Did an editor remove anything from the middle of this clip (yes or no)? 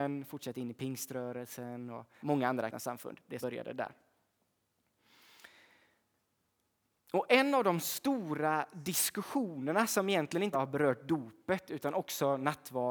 yes